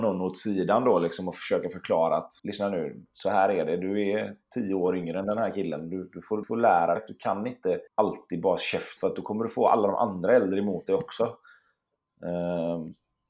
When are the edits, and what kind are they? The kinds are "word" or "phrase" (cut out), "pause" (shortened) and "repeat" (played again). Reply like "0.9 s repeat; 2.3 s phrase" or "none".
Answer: 2.4 s pause; 6.4 s word; 7.0 s word; 7.9 s pause; 9.0 s word